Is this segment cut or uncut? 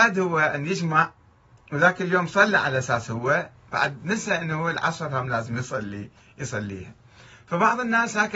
uncut